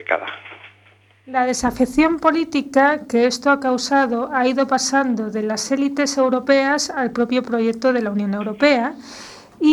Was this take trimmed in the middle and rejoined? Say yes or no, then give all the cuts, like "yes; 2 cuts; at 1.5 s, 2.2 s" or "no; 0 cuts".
no; 0 cuts